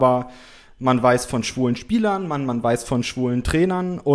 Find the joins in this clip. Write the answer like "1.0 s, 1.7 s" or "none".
none